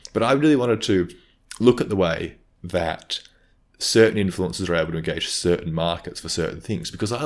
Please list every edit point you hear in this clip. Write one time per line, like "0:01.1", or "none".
none